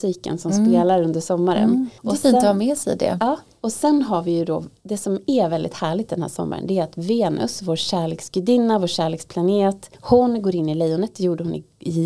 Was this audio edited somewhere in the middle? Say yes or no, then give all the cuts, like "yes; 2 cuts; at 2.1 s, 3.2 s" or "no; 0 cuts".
yes; 2 cuts; at 2.0 s, 9.9 s